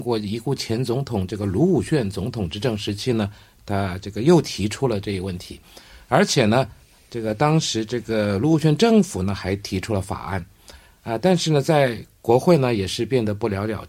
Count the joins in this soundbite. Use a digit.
0